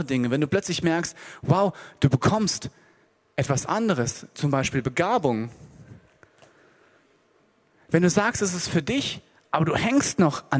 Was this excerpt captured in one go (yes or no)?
yes